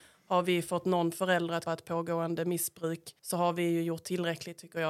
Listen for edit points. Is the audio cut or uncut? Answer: cut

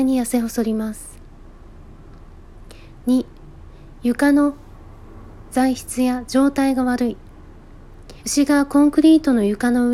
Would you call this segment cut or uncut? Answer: cut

